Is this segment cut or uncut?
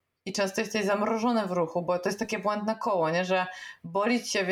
uncut